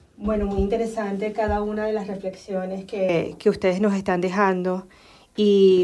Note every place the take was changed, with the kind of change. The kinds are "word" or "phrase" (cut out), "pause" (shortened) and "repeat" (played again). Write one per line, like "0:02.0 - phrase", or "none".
none